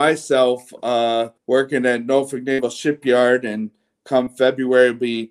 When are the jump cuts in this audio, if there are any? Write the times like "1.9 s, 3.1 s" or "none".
1.4 s